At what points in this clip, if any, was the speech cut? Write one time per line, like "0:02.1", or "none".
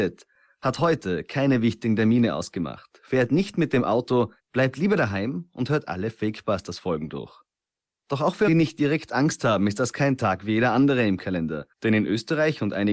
0:04.4
0:07.6
0:08.5
0:11.7

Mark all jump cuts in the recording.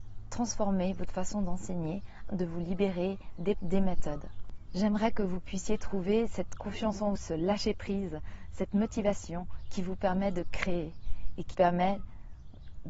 0:02.3
0:03.5
0:07.2
0:11.5

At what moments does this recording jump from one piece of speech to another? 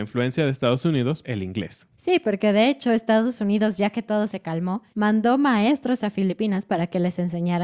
0:01.2
0:01.9
0:04.9

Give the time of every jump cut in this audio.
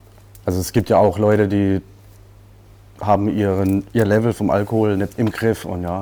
0:05.1

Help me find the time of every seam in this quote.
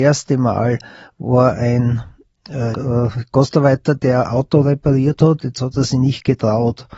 0:02.7

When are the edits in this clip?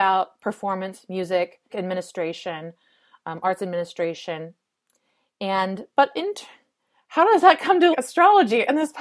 0:01.7
0:07.9

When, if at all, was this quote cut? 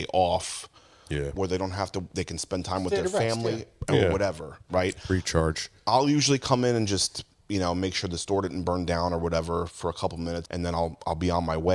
0:10.5

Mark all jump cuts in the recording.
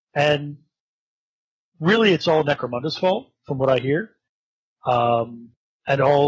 none

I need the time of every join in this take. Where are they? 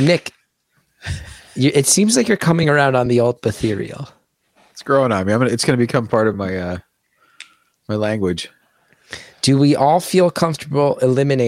none

